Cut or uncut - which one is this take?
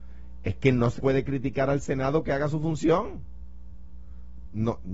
cut